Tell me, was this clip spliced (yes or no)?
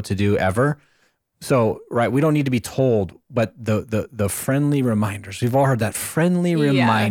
no